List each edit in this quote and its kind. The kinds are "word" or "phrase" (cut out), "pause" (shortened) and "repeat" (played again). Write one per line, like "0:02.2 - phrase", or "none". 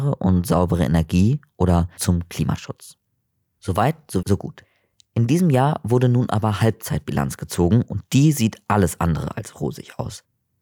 0:02.0 - word
0:04.2 - word